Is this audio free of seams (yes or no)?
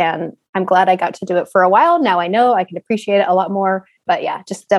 yes